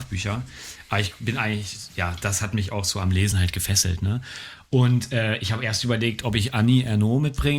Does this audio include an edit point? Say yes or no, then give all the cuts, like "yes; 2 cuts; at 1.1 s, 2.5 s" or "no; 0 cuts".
no; 0 cuts